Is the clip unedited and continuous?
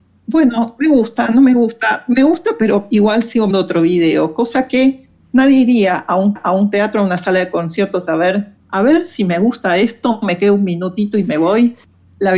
no; 3 cuts; at 3.5 s, 6.4 s, 8.6 s

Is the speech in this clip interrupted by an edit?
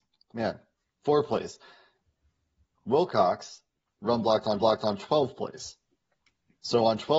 yes; 1 cut; at 4.6 s

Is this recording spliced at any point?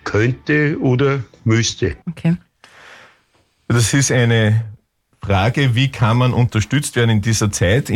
no; 0 cuts

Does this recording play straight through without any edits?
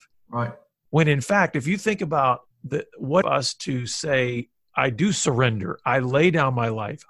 no; 2 cuts; at 2.5 s, 3.2 s

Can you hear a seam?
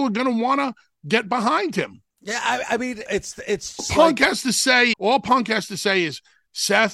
yes; 4 cuts; at 2.1 s, 3.1 s, 3.8 s, 4.9 s

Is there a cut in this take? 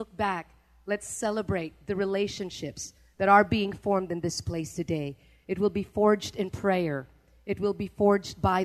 no; 0 cuts

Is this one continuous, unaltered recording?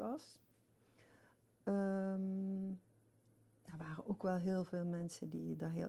yes; 0 cuts

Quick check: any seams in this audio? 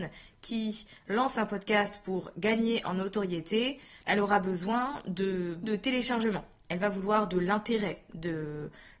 yes; 2 cuts; at 4.0 s, 5.6 s

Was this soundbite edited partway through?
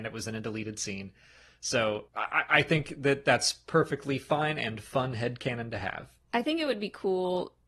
yes; 2 cuts; at 2.1 s, 6.2 s

